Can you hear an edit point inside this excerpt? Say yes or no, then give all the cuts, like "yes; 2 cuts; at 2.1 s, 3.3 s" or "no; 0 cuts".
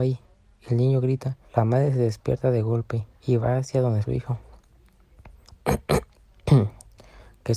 yes; 3 cuts; at 1.5 s, 3.2 s, 4.0 s